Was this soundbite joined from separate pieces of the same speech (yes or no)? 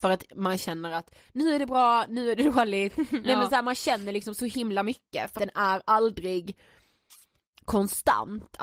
yes